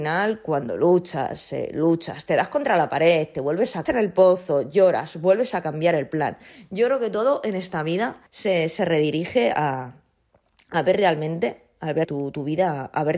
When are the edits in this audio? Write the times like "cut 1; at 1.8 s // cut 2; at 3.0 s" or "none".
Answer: cut 1; at 3.9 s // cut 2; at 8.3 s // cut 3; at 12.0 s